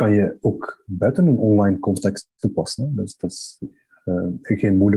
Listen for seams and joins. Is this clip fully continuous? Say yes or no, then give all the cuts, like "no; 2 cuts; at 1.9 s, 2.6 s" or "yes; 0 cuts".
yes; 0 cuts